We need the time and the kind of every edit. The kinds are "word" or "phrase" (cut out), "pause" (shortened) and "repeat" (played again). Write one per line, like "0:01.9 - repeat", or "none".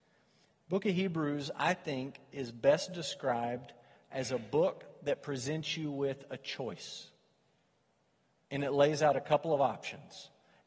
none